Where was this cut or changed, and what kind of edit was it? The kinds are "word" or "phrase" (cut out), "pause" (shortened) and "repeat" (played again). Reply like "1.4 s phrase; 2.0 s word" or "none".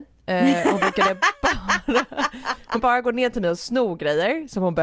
2.8 s word